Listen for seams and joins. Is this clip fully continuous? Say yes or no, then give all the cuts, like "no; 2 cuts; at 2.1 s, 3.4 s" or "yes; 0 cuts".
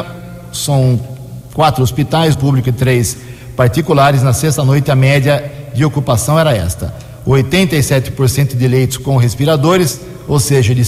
no; 1 cut; at 2.3 s